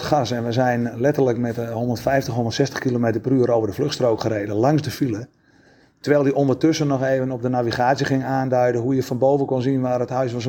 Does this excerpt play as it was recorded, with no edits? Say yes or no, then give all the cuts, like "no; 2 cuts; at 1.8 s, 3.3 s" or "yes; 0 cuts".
yes; 0 cuts